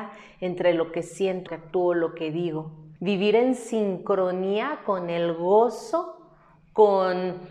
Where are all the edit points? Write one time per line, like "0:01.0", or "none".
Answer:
0:01.5
0:03.0

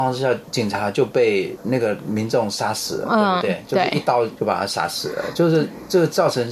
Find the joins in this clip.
none

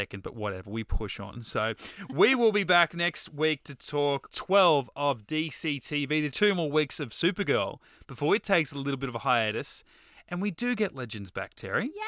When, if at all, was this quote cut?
0:04.3
0:06.3

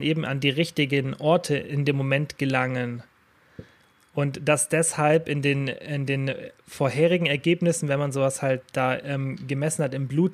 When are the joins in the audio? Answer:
none

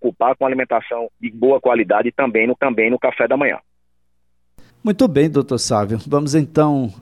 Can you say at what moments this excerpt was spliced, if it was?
0:01.1
0:02.6
0:04.7

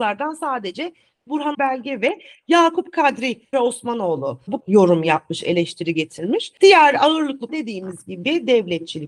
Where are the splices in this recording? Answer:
0:01.5
0:03.5
0:04.6
0:07.5

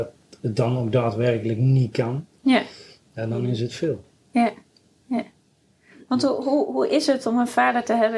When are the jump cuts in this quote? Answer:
none

